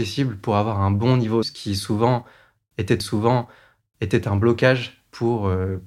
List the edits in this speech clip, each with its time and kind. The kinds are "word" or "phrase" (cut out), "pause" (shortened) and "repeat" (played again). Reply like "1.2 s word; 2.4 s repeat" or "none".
1.4 s phrase; 3.0 s repeat